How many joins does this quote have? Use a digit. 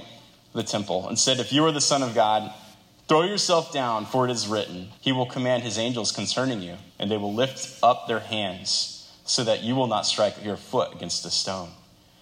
2